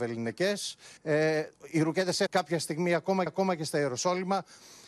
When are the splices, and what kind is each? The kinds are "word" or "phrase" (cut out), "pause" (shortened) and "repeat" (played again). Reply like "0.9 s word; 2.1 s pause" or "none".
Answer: 1.0 s pause; 2.3 s word; 3.3 s repeat